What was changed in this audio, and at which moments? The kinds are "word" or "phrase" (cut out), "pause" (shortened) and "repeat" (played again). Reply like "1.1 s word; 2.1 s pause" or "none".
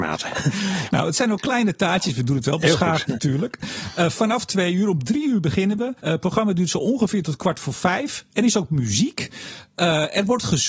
6.0 s pause

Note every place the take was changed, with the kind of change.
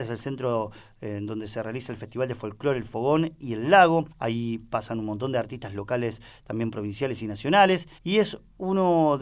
4.1 s pause; 8.0 s pause

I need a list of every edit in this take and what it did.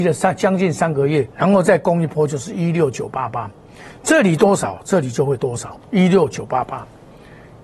1.3 s pause; 5.8 s pause

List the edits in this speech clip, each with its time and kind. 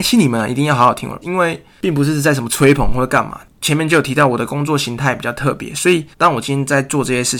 1.2 s word; 3.5 s pause; 6.1 s pause

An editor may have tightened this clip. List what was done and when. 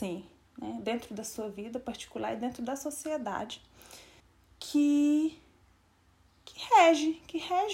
4.2 s pause

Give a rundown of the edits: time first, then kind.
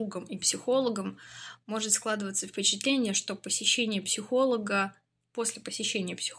none

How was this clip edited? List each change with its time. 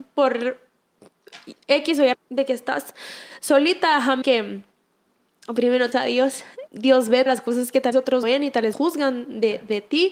2.1 s word; 4.2 s word; 5.9 s word; 6.7 s word; 7.3 s word; 7.9 s word; 8.2 s word; 8.7 s word

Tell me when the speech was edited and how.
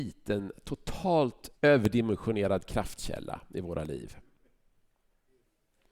1.5 s pause

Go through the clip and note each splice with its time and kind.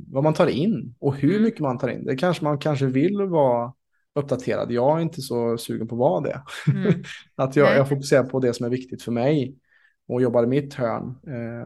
none

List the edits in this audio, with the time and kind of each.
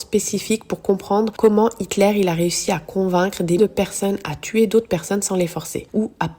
3.6 s word

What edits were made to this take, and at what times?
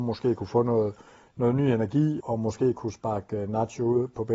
2.2 s word

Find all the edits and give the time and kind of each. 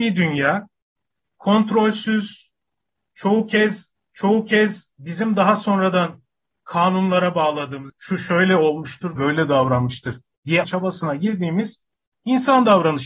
4.0 s repeat; 7.9 s word; 9.2 s word; 10.6 s word

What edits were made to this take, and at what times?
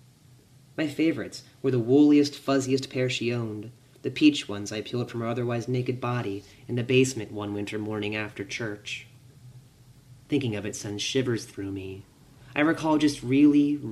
12.2 s pause

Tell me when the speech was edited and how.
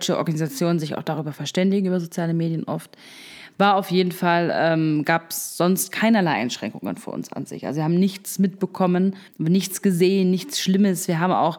9.3 s pause

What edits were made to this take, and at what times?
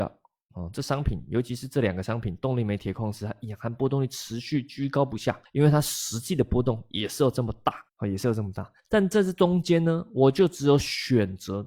5.4 s pause; 7.9 s pause; 8.8 s pause

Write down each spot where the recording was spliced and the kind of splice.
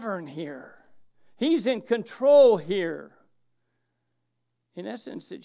none

